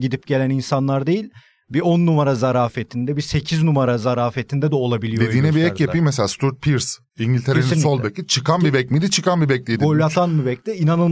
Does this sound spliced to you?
no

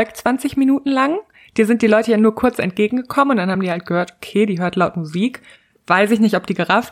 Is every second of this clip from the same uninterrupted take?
yes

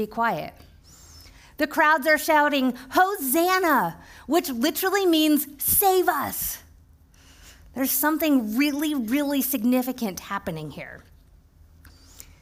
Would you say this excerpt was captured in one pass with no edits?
yes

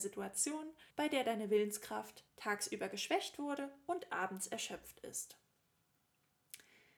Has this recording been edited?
yes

